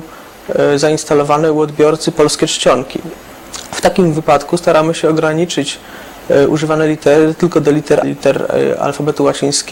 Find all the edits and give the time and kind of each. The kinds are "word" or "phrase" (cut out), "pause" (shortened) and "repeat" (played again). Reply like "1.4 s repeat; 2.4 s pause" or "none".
8.0 s phrase